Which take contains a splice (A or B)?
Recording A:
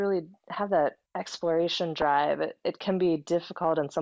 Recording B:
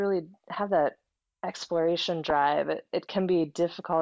A